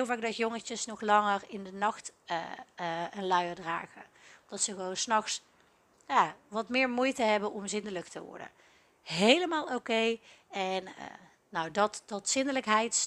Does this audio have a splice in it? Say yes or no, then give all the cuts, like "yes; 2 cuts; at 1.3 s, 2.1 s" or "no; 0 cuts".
no; 0 cuts